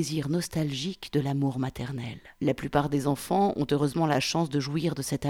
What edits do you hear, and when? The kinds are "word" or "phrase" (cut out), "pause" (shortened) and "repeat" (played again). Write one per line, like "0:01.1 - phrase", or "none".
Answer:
0:02.3 - pause